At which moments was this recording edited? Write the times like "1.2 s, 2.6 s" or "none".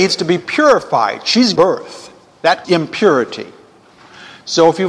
1.6 s, 2.6 s